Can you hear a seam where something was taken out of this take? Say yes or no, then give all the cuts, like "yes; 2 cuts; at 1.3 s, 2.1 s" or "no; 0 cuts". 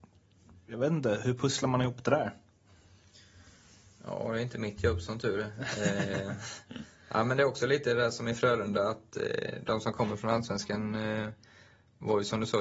no; 0 cuts